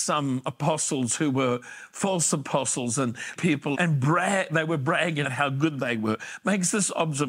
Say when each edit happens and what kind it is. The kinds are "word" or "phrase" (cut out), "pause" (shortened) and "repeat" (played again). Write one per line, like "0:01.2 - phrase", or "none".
0:03.4 - word
0:03.7 - word
0:05.2 - word